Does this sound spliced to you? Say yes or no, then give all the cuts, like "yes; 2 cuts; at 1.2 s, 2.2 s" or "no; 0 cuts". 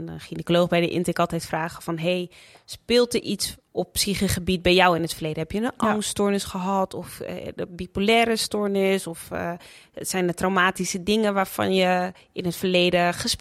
no; 0 cuts